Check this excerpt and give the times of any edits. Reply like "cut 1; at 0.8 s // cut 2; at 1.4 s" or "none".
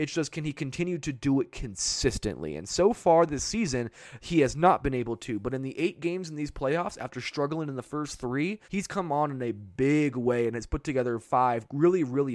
cut 1; at 8.6 s